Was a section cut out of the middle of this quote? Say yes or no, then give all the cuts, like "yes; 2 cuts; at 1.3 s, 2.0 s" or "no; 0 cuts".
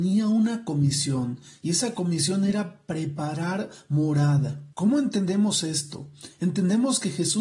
yes; 1 cut; at 4.7 s